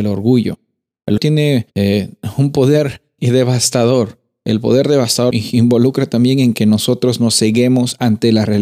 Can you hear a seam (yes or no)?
yes